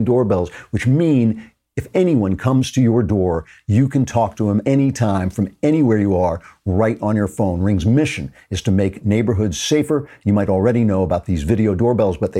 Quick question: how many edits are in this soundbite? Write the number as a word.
one